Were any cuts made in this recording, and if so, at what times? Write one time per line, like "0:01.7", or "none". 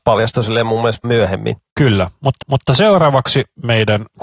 0:01.0
0:02.4